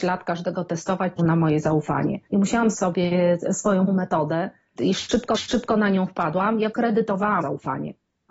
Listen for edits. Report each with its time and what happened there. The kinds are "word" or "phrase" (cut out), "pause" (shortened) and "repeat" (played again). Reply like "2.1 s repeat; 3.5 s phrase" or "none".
1.2 s phrase; 2.3 s pause; 2.7 s word; 3.9 s word; 4.8 s word; 5.3 s repeat; 6.7 s phrase; 7.4 s word